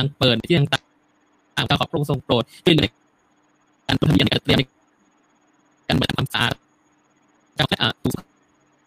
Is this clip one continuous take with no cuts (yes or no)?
yes